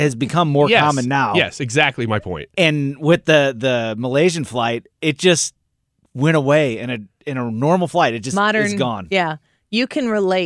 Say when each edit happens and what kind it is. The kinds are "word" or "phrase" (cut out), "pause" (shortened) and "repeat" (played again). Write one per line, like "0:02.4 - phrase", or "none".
none